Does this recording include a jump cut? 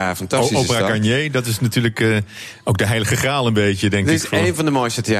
no; 0 cuts

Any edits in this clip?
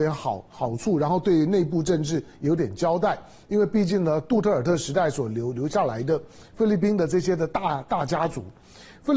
no; 0 cuts

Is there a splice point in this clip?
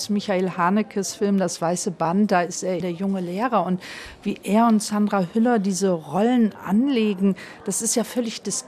yes; 1 cut; at 2.8 s

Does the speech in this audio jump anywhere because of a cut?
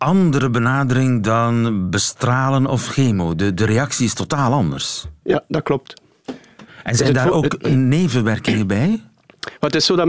no; 0 cuts

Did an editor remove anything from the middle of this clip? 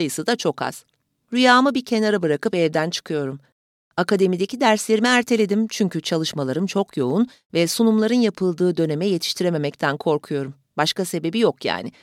no; 0 cuts

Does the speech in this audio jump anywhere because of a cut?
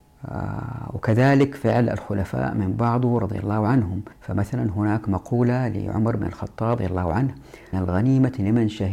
yes; 3 cuts; at 4.1 s, 6.8 s, 7.7 s

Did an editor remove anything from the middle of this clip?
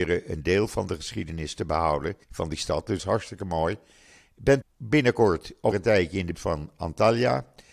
yes; 5 cuts; at 2.2 s, 3.0 s, 4.6 s, 5.7 s, 6.3 s

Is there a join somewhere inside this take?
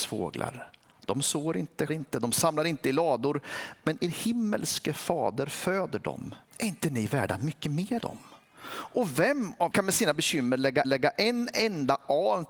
yes; 5 cuts; at 1.9 s, 6.5 s, 8.0 s, 9.7 s, 10.8 s

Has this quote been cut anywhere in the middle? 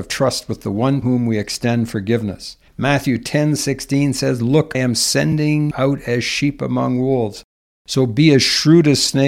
yes; 3 cuts; at 1.0 s, 4.7 s, 5.7 s

